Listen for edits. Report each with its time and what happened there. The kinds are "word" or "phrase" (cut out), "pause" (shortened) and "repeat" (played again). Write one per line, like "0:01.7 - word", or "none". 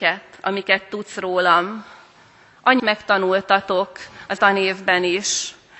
0:02.8 - word
0:04.4 - word